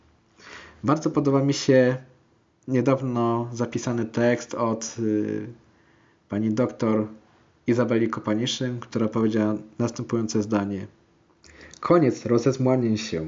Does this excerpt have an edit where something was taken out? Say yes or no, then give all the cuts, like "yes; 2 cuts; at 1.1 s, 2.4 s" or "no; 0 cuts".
no; 0 cuts